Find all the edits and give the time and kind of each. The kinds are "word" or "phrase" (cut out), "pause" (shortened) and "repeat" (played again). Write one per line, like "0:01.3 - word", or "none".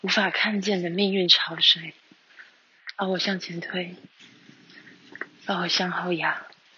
0:02.9 - pause